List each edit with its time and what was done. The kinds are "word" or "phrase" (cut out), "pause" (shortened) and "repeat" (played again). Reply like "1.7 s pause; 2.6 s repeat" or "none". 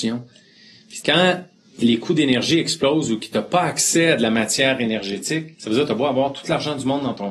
1.0 s word; 5.5 s pause

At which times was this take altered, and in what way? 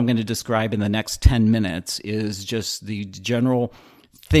none

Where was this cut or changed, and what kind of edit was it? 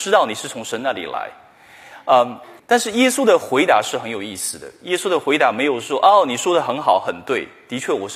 2.6 s pause

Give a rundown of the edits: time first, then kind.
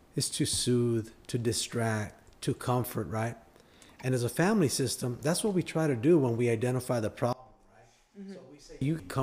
none

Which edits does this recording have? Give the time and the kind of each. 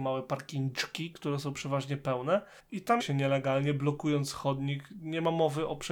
2.6 s pause; 3.0 s phrase

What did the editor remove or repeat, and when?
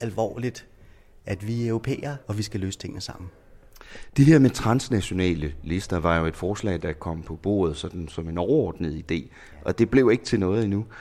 2.2 s pause

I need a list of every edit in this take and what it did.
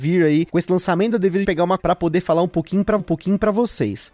1.4 s word; 1.8 s word; 3.0 s repeat

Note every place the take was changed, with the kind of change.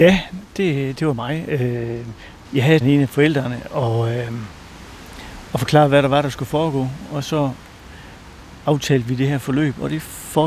1.0 s word; 2.8 s phrase

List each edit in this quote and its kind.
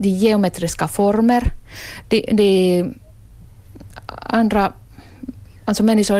none

